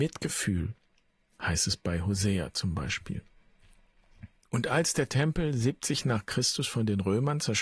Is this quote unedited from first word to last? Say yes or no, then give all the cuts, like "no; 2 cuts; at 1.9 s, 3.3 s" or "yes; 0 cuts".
yes; 0 cuts